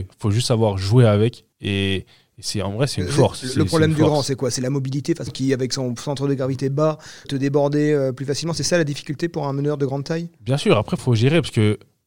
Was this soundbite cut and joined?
yes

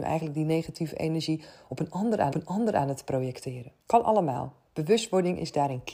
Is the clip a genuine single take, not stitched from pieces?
no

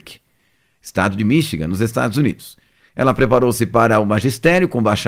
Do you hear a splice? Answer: no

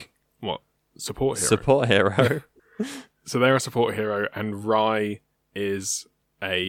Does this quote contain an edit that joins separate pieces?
no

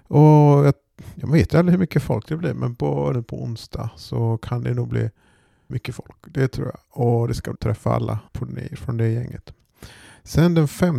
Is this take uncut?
no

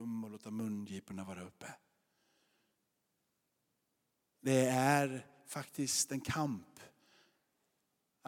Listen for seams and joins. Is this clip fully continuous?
yes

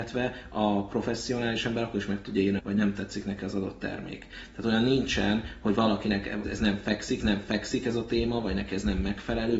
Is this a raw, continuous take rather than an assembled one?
no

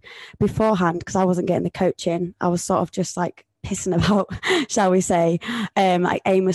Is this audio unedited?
no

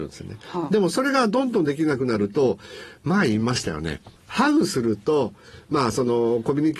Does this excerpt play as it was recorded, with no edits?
no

